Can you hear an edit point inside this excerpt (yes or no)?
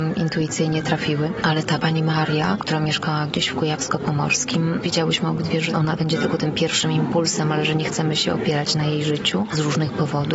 no